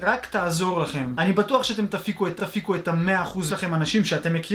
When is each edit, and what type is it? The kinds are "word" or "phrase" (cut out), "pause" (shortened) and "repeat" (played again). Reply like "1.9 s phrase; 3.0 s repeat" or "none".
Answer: 2.4 s repeat; 3.5 s phrase